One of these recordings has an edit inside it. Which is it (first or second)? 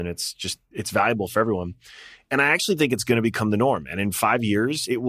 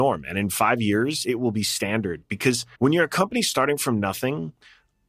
second